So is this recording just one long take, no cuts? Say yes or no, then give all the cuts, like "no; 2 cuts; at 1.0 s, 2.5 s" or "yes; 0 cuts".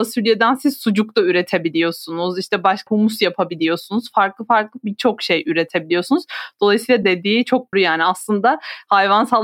no; 3 cuts; at 2.9 s, 7.0 s, 7.7 s